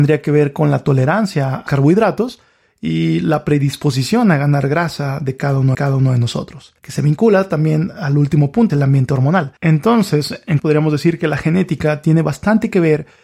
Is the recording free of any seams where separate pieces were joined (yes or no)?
no